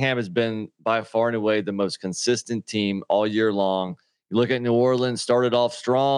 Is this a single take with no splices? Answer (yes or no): yes